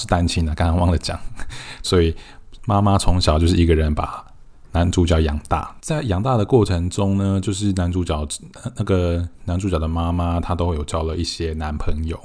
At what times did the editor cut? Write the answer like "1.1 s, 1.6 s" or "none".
1.8 s